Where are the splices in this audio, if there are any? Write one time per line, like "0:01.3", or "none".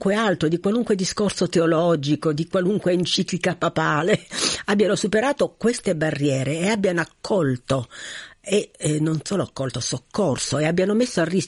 none